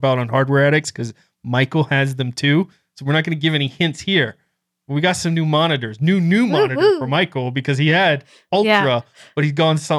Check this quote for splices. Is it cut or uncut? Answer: uncut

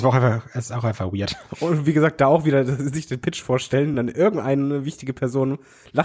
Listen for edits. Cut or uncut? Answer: uncut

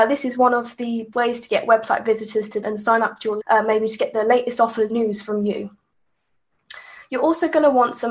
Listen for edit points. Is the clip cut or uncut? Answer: cut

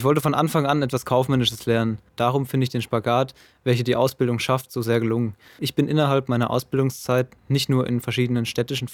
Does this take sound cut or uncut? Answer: uncut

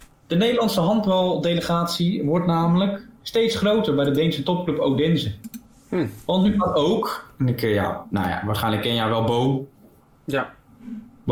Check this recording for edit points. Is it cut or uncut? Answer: uncut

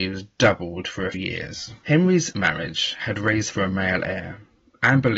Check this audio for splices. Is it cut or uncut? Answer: cut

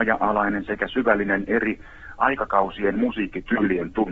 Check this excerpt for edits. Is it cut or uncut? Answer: uncut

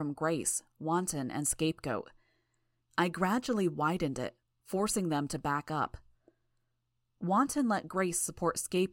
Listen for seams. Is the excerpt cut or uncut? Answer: uncut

